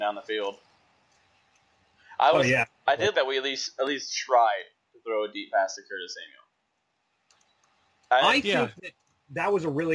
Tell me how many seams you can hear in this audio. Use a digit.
1